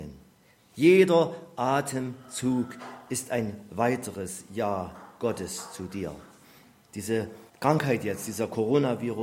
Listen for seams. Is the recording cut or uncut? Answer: cut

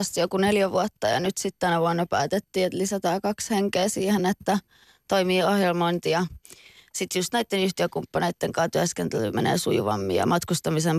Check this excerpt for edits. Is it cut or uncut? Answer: uncut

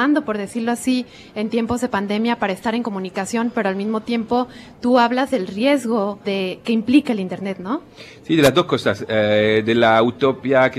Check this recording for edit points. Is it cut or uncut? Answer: cut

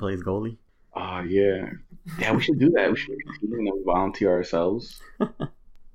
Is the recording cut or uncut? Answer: uncut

